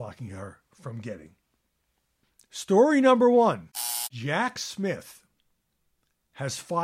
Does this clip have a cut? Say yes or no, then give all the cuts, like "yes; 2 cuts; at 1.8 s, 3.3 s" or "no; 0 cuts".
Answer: no; 0 cuts